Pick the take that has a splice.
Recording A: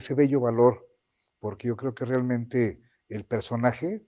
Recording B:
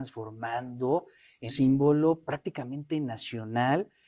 B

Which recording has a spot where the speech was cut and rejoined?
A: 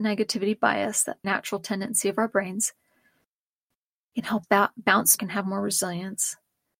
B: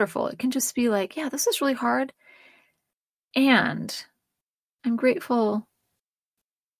A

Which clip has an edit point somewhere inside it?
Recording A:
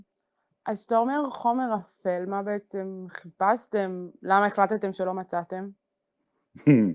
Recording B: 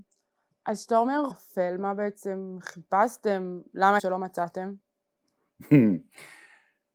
B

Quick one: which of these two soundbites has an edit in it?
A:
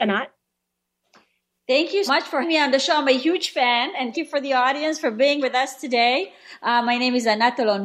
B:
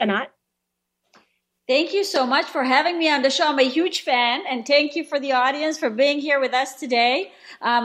A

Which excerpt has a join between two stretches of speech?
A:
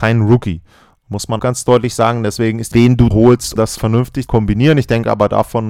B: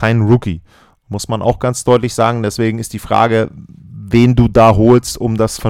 A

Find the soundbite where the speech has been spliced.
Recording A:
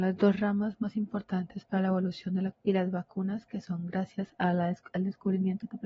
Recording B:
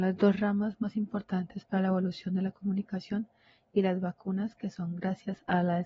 A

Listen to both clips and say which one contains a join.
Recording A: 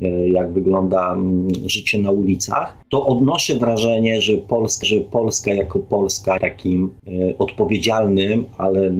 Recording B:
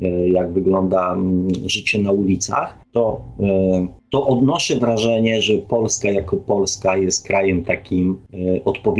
A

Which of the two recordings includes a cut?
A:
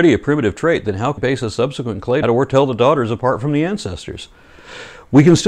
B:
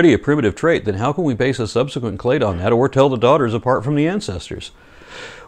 A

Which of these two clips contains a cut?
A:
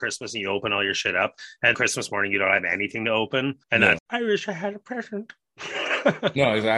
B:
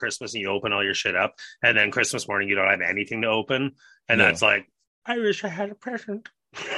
A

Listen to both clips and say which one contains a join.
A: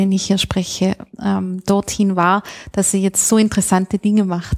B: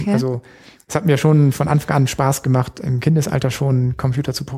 A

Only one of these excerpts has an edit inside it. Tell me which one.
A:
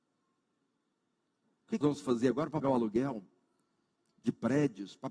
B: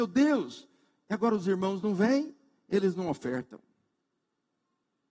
A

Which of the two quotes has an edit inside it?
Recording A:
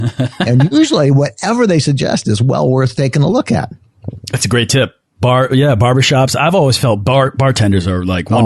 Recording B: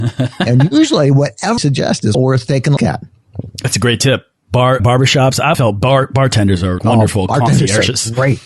B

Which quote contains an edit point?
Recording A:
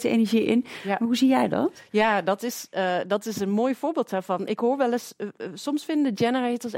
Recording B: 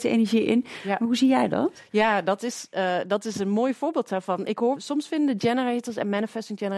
B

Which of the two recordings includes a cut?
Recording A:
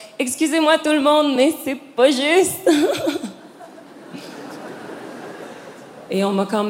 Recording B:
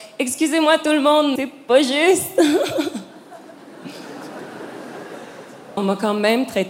B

